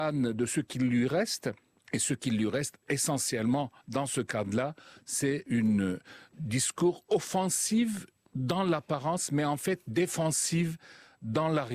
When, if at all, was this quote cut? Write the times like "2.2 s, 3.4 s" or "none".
2.8 s